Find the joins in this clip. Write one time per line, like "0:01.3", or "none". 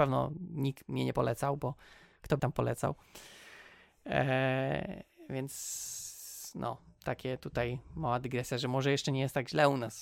0:02.4